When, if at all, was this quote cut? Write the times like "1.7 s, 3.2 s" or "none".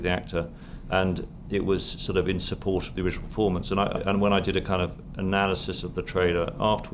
4.0 s